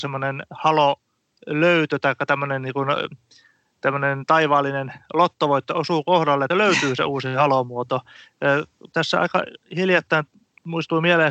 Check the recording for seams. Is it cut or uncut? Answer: cut